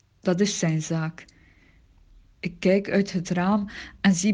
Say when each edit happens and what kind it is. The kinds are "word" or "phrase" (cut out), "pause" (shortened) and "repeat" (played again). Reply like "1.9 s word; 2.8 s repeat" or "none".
none